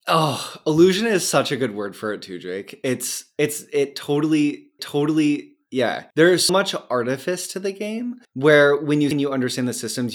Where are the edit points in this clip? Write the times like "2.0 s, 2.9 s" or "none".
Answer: 4.8 s, 6.5 s, 9.1 s